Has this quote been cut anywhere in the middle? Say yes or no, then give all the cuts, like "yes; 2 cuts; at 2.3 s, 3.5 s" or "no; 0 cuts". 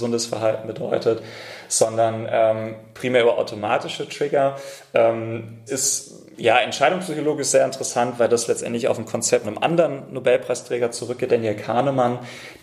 yes; 3 cuts; at 5.7 s, 9.4 s, 11.3 s